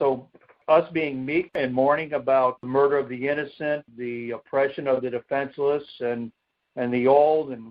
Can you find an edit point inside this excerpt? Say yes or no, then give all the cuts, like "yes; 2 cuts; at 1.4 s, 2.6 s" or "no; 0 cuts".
yes; 1 cut; at 3.9 s